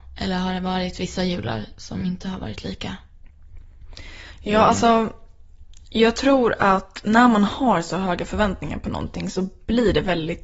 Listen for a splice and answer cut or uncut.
uncut